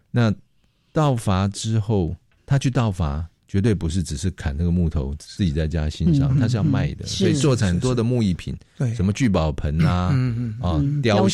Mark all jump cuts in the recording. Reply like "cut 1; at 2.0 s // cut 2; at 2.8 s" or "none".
cut 1; at 2.4 s